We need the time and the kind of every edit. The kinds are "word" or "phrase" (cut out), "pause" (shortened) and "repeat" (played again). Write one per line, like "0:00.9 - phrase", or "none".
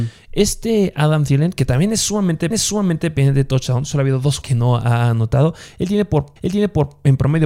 0:02.5 - repeat
0:04.4 - word
0:06.4 - repeat